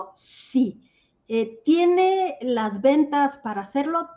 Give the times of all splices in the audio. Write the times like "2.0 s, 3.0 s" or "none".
none